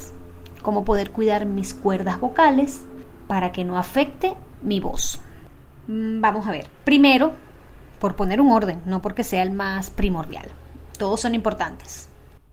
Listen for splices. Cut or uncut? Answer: cut